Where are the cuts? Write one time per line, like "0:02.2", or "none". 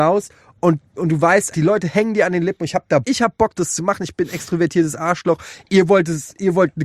0:01.0
0:01.5
0:03.0
0:03.6